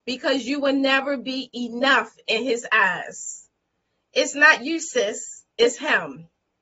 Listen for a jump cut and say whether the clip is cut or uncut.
uncut